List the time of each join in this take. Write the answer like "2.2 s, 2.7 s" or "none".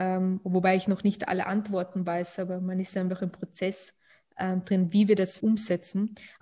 5.4 s

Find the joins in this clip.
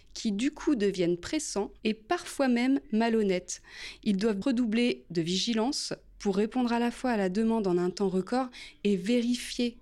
4.4 s

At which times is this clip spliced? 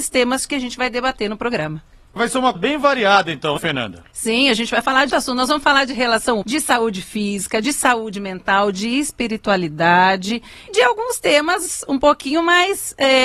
2.2 s, 2.5 s, 3.6 s, 5.1 s, 6.4 s, 10.7 s

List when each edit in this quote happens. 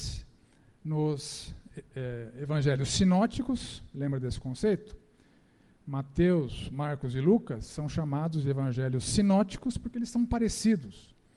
none

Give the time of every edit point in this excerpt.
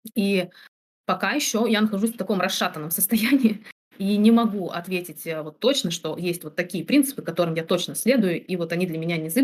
none

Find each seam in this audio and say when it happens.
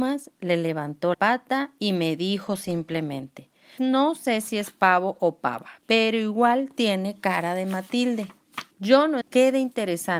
1.1 s, 3.8 s, 5.8 s, 8.7 s, 9.2 s

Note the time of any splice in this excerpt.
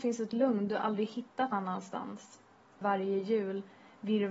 1.5 s, 2.8 s

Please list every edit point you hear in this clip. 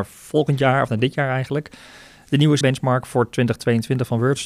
2.6 s

